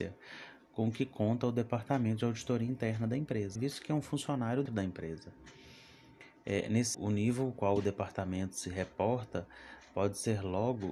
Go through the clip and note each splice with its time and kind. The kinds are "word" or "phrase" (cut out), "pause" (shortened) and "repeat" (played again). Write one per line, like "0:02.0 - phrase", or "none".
0:03.6 - word
0:04.7 - word
0:06.9 - word